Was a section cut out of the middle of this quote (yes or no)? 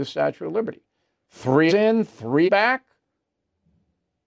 yes